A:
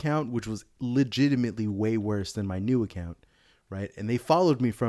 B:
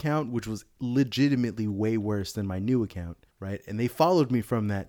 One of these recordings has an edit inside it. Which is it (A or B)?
B